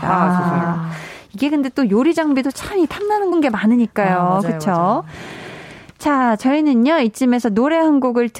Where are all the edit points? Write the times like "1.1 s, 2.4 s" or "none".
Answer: 3.3 s